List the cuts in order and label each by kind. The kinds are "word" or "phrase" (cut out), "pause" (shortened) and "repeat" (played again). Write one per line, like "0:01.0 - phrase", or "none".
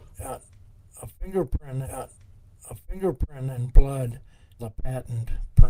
0:01.8 - repeat
0:04.6 - phrase